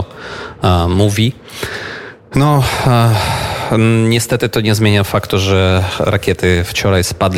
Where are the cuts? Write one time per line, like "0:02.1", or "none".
none